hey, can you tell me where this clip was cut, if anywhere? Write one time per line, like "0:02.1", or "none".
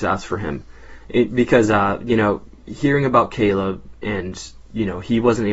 none